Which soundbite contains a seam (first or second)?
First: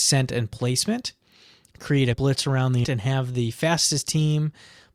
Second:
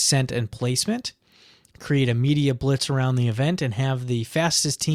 first